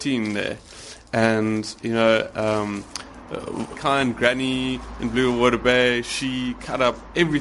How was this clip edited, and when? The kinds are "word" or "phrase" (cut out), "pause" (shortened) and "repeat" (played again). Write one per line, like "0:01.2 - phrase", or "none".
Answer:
0:03.7 - word